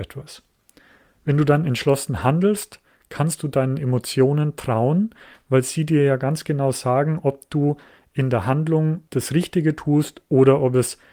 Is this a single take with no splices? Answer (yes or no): yes